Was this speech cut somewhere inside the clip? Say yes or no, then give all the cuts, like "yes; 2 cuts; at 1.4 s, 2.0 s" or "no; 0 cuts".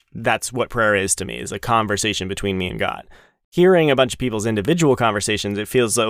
no; 0 cuts